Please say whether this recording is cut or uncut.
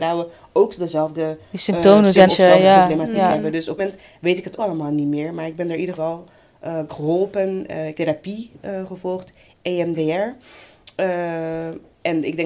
cut